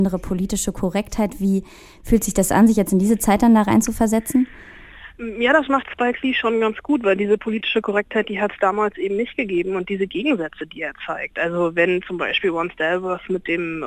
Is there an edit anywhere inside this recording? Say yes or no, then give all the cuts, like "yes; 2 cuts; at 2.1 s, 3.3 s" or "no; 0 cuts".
no; 0 cuts